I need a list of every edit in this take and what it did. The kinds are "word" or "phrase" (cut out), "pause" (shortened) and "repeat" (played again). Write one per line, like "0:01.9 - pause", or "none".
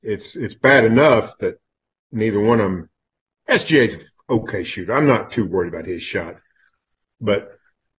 none

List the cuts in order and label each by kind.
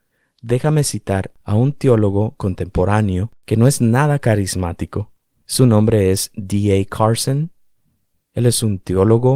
0:03.4 - pause

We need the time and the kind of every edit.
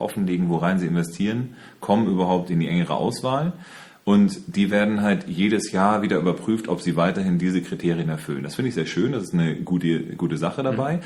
none

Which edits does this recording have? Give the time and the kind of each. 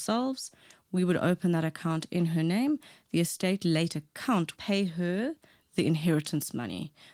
0:04.6 - phrase

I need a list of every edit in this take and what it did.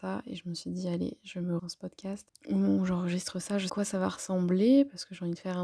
0:01.6 - word
0:03.7 - phrase

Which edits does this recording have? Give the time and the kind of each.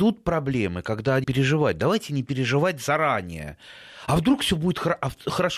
0:01.2 - phrase

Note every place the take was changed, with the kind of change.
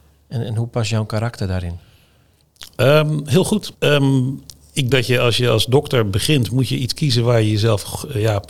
0:03.7 - pause
0:04.9 - word

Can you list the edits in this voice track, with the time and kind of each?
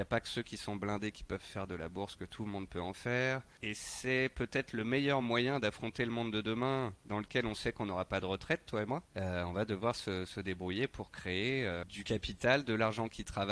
none

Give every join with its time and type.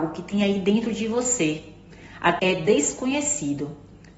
0:02.4 - word

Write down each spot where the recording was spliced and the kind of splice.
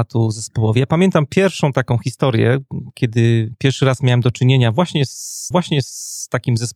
0:05.5 - repeat

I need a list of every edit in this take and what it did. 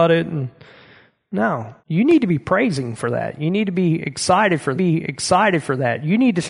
0:01.8 - pause
0:04.7 - repeat

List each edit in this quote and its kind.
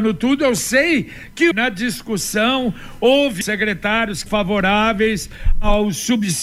0:01.5 - word
0:03.4 - word
0:04.3 - word

